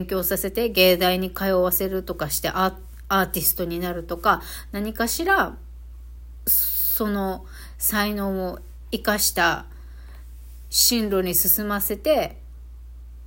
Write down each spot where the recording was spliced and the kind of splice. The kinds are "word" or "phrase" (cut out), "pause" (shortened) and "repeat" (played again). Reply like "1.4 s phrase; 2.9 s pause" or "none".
none